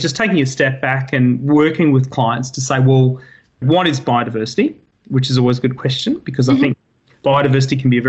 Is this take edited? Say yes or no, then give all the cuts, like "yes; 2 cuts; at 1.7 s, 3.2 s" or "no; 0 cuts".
no; 0 cuts